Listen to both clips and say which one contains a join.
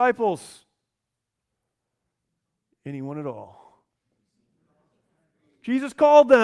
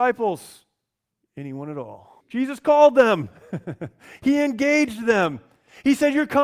second; 2 cuts; at 1.1 s, 2.2 s

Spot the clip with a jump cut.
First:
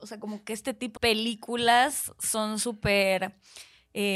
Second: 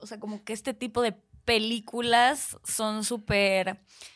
first; 1 cut; at 1.0 s

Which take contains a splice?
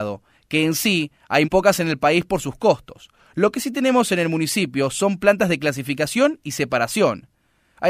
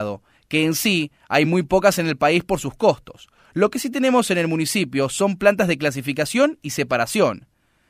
first; 1 cut; at 1.4 s

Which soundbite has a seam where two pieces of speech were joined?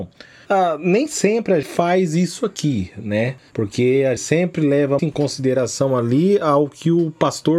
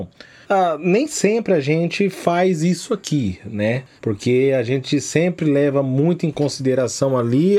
first; 3 cuts; at 1.6 s, 4.2 s, 5.0 s

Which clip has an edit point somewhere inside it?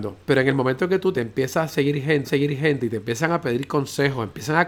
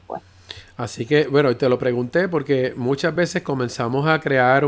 first; 2 cuts; at 1.1 s, 2.2 s

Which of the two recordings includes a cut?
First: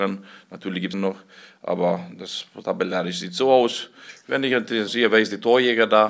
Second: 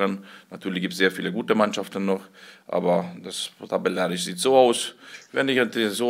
first; 2 cuts; at 0.9 s, 4.9 s

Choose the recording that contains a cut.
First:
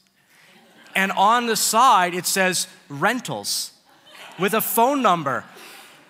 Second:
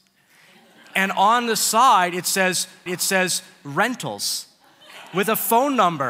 second; 1 cut; at 2.9 s

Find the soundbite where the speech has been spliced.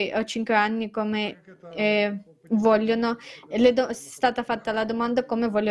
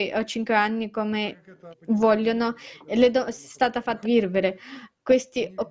second; 2 cuts; at 1.7 s, 4.0 s

